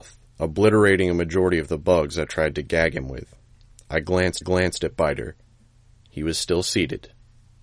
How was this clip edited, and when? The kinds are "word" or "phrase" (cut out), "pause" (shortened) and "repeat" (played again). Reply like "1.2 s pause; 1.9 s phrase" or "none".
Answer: 4.4 s repeat